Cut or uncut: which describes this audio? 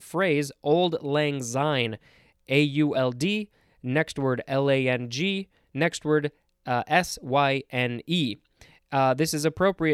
uncut